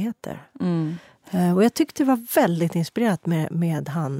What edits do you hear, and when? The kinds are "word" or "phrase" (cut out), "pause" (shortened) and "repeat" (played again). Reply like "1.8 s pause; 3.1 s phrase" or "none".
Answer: none